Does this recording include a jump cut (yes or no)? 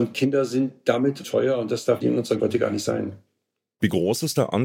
yes